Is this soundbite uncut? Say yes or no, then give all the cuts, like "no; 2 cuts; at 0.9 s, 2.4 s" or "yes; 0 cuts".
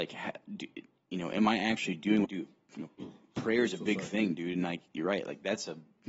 no; 2 cuts; at 2.2 s, 2.9 s